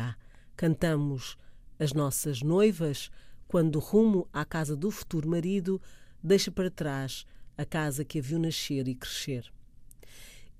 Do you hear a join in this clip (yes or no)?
no